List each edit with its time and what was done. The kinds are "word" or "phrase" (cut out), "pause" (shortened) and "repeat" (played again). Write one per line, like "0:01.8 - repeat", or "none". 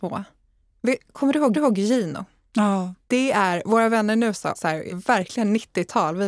0:01.5 - repeat
0:03.0 - pause
0:04.5 - word
0:04.9 - word